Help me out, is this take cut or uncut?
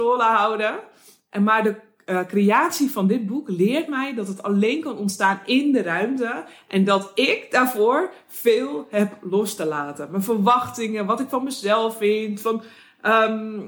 uncut